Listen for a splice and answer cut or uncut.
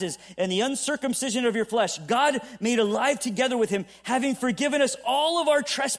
uncut